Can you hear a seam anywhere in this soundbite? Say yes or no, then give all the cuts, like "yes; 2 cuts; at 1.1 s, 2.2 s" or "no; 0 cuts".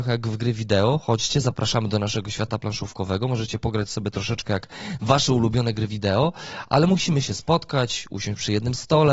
no; 0 cuts